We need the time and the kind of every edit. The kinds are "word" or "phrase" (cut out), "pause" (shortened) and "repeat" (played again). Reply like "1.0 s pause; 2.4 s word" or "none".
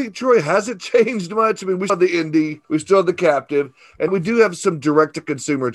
1.9 s word; 2.6 s pause; 4.1 s word